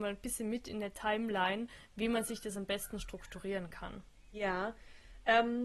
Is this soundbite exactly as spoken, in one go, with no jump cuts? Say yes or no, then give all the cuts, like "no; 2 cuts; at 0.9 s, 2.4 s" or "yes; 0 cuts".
yes; 0 cuts